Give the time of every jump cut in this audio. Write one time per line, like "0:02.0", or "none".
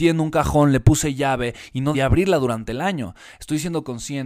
0:01.9

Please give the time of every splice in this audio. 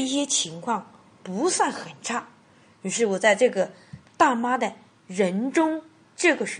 0:04.1

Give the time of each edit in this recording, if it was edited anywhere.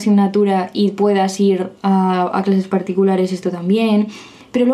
none

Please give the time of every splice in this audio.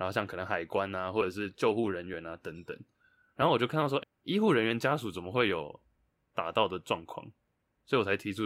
0:04.0

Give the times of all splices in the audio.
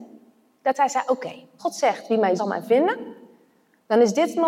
0:01.6
0:02.4

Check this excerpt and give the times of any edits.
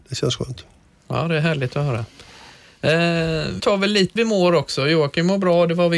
0:03.6
0:04.2

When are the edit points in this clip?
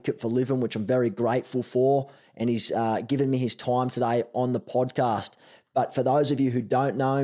none

